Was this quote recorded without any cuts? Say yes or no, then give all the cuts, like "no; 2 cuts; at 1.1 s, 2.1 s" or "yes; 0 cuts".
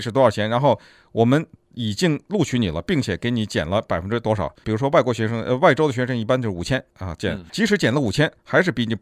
no; 2 cuts; at 6.9 s, 7.5 s